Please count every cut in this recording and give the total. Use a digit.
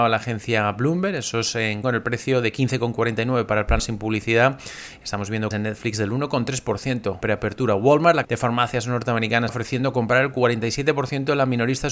6